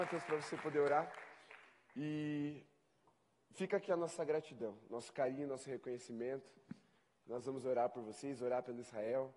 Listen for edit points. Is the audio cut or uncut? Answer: uncut